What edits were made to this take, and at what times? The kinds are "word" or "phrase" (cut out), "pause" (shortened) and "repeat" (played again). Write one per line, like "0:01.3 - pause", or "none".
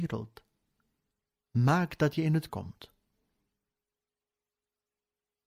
0:02.5 - word

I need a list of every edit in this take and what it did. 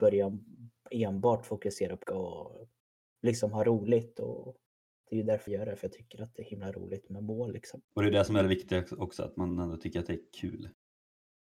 0:02.0 - word
0:05.5 - word
0:07.8 - pause

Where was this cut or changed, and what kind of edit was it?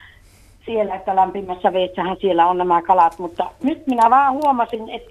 none

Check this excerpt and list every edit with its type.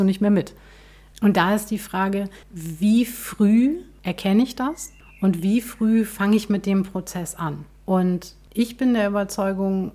0:02.4 - pause

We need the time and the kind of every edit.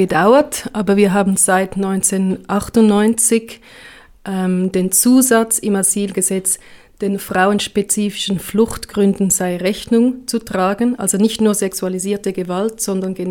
none

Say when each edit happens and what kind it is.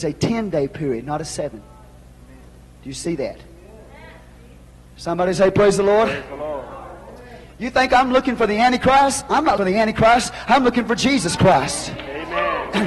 0:09.6 - word

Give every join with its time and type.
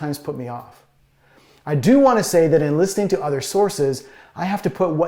none

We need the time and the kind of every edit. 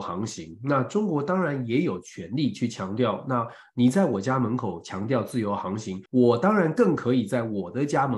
0:06.1 - pause

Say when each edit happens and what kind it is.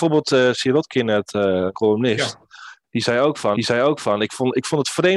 0:01.7 - phrase
0:03.6 - repeat

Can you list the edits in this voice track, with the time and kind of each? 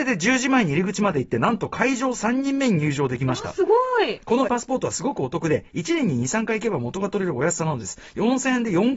0:04.5 - word

